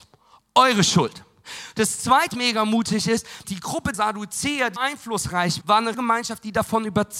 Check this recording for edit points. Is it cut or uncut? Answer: cut